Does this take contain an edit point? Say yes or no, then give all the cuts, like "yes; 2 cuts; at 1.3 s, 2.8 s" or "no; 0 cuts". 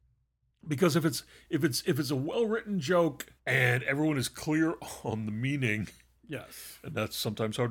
yes; 1 cut; at 3.4 s